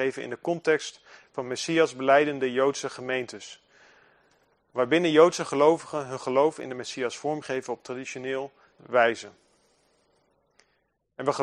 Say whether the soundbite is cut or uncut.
cut